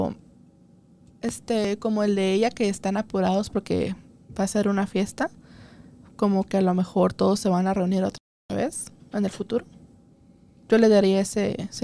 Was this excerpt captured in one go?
yes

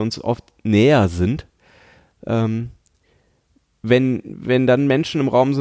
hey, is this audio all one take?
yes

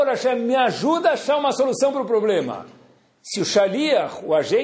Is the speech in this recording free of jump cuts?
yes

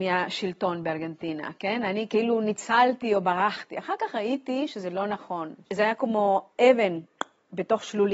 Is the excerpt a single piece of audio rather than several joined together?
yes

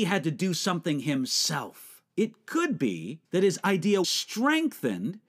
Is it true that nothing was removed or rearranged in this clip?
no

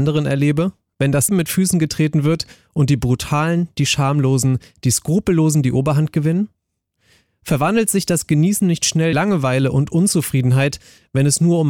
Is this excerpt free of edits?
no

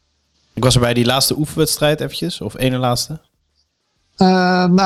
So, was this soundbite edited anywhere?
no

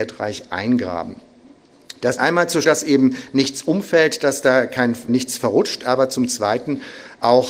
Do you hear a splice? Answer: yes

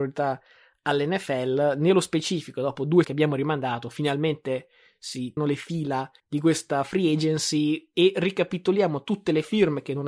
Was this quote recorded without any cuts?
no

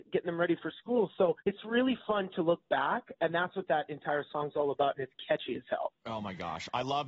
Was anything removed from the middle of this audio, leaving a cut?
yes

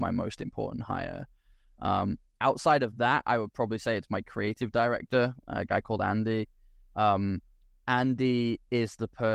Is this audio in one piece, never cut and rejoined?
yes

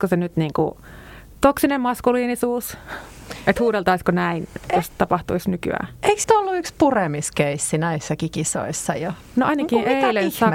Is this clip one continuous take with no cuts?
no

